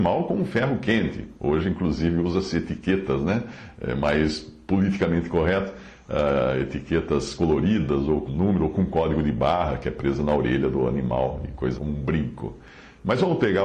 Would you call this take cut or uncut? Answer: cut